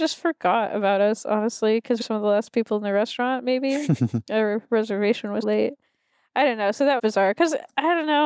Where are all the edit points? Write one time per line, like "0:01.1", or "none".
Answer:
0:02.0
0:05.4
0:07.0